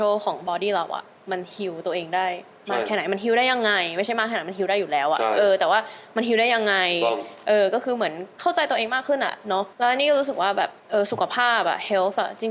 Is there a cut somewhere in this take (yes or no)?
yes